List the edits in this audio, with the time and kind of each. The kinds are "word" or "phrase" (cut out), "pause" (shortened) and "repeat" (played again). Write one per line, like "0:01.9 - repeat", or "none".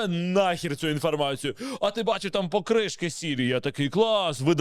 none